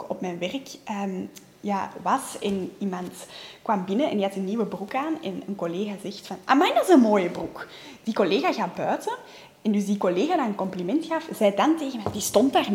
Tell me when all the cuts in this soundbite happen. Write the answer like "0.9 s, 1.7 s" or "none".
none